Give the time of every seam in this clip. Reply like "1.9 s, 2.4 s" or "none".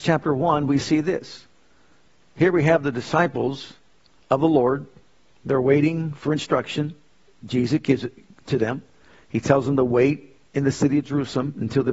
5.2 s